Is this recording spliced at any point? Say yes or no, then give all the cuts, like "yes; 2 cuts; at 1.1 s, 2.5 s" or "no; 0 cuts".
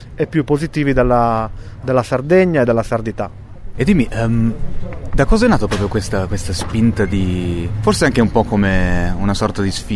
no; 0 cuts